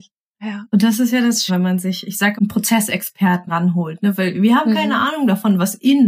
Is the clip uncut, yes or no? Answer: no